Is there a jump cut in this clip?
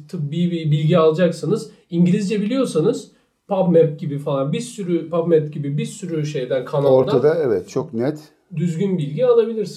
no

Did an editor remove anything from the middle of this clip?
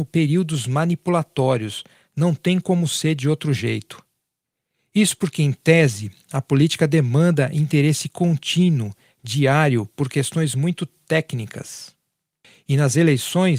no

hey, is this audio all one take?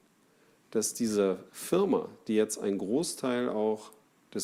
no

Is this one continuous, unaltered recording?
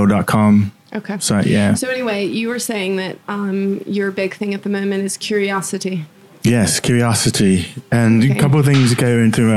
yes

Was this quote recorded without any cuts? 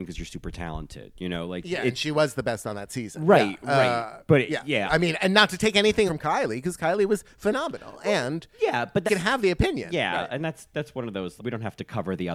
no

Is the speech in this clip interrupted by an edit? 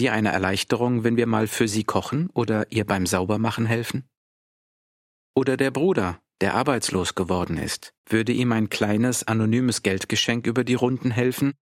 yes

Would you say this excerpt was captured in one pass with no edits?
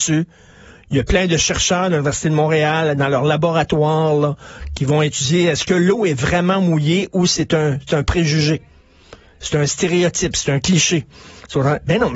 yes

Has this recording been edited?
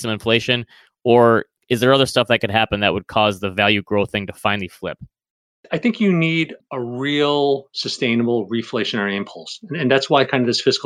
no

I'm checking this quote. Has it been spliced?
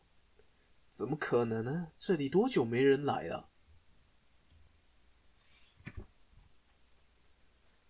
no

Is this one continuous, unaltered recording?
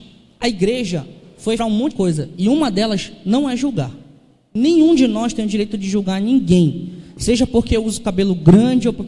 no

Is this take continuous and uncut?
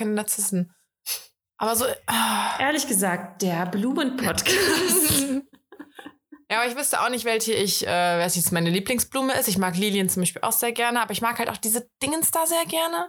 yes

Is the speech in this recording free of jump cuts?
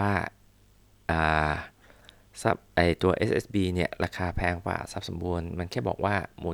yes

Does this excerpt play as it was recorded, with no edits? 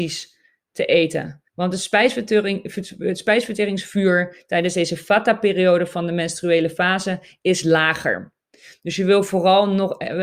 no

